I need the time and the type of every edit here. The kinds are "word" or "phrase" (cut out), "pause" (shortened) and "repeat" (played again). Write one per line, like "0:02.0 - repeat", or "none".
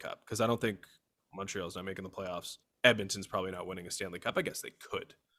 0:02.6 - pause